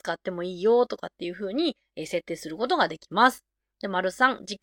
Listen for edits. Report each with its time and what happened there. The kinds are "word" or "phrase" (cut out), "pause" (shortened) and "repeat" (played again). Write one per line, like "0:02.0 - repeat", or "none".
none